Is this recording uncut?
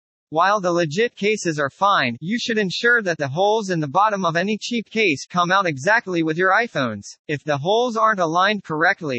no; 1 cut; at 7.2 s

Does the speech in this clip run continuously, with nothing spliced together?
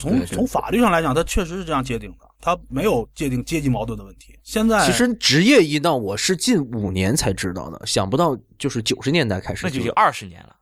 no; 1 cut; at 4.4 s

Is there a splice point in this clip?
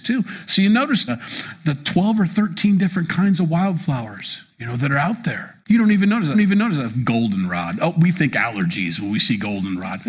yes; 3 cuts; at 1.1 s, 5.6 s, 6.3 s

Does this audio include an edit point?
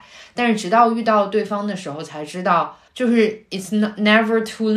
yes; 1 cut; at 2.9 s

